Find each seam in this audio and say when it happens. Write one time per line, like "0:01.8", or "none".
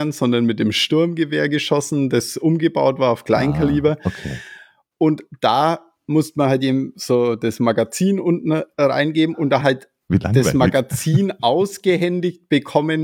0:09.6

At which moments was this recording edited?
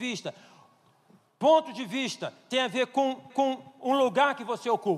0:03.3

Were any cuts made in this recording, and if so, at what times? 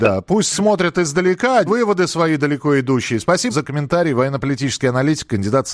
0:01.7
0:03.5

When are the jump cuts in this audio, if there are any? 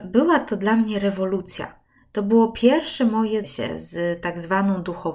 0:03.4

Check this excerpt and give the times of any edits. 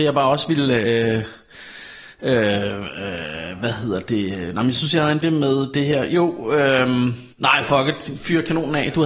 0:02.1
0:05.2
0:07.3

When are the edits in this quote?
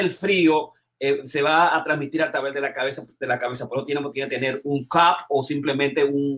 none

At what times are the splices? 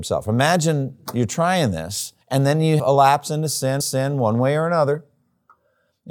0:02.2
0:02.8
0:03.8

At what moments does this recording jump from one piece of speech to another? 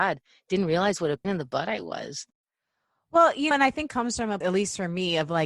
0:01.2
0:03.5
0:03.9
0:04.4

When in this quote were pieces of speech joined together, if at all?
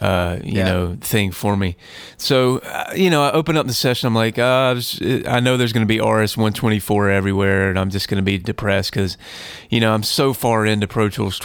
none

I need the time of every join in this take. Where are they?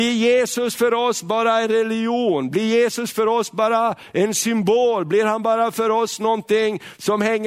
none

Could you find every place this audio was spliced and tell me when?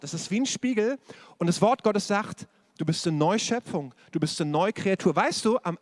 none

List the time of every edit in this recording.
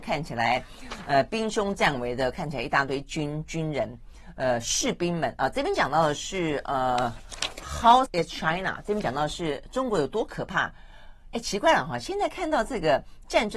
0:08.1

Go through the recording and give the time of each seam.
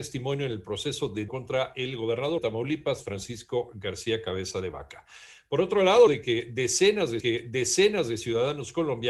0:01.3
0:02.4
0:06.1
0:07.2

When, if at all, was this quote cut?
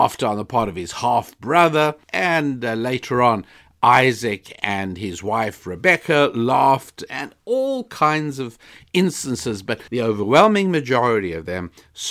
0:02.0
0:09.9

